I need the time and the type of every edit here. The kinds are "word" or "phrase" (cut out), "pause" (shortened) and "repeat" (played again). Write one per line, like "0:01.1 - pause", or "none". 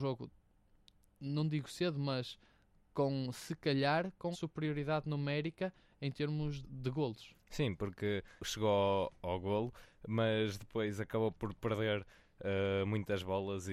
0:04.3 - word
0:06.6 - word
0:08.4 - word